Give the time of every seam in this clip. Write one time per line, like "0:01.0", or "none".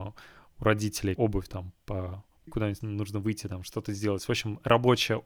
0:01.2
0:01.5
0:02.5
0:02.8